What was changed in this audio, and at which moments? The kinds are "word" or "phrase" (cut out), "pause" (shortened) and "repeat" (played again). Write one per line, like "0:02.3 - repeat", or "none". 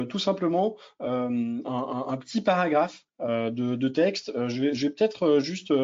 0:03.1 - pause